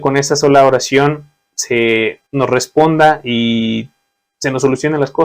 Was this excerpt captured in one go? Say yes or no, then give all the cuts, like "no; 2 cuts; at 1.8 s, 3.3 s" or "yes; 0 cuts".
no; 1 cut; at 2.3 s